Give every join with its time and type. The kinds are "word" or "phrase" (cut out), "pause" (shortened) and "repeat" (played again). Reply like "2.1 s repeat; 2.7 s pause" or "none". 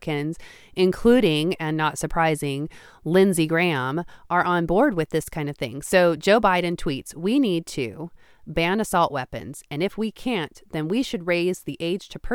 none